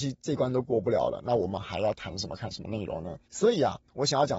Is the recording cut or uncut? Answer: cut